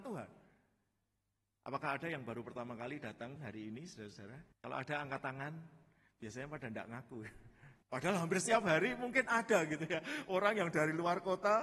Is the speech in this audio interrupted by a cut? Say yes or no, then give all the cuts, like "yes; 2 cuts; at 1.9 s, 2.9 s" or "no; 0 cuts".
yes; 3 cuts; at 3.4 s, 4.5 s, 7.8 s